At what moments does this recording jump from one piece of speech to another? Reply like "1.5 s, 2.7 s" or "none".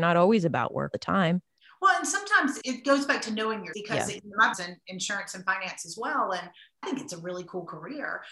0.9 s, 2.6 s, 3.7 s, 4.5 s, 6.8 s